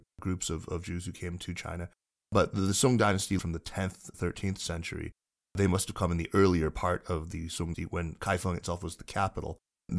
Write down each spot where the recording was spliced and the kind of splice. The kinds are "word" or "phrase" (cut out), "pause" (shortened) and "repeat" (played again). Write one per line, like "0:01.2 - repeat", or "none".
0:03.4 - word
0:04.1 - word
0:07.7 - word